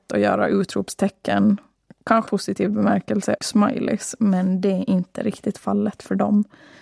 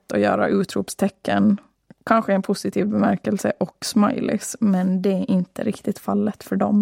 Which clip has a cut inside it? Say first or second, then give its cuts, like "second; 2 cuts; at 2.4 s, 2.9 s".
first; 2 cuts; at 2.3 s, 3.4 s